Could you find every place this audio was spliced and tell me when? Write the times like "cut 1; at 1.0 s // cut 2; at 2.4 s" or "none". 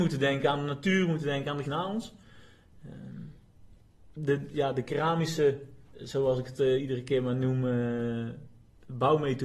cut 1; at 1.6 s // cut 2; at 5.8 s